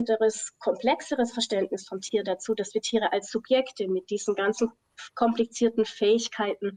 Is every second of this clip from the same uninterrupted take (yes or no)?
yes